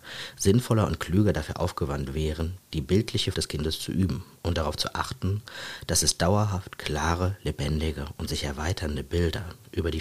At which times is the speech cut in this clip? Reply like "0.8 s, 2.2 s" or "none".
3.3 s